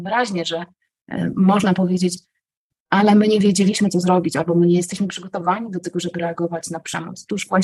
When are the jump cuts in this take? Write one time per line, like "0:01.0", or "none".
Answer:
none